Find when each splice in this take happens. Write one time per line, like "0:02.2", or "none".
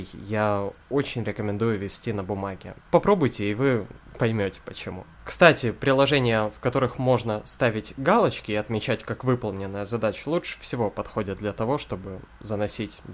0:02.8